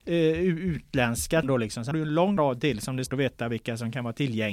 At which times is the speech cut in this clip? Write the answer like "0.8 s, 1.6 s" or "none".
1.4 s, 1.9 s, 2.4 s, 3.1 s